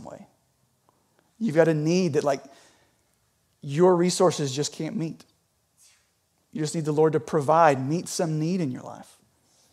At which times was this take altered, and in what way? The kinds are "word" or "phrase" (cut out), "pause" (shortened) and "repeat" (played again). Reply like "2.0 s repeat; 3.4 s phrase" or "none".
none